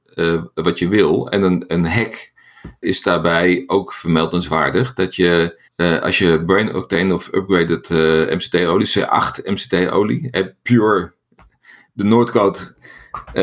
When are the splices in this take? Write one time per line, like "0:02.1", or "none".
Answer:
0:02.8
0:05.7